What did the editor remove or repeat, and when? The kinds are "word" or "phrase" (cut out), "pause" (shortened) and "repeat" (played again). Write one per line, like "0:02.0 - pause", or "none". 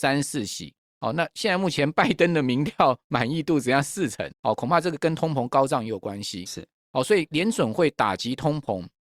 0:04.3 - pause